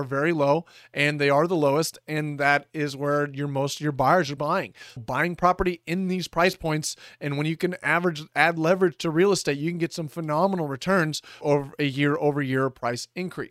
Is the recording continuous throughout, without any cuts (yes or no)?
no